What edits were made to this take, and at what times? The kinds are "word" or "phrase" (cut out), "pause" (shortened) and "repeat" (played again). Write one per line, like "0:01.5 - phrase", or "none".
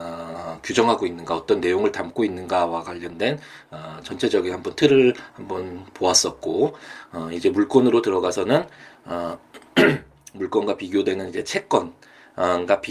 none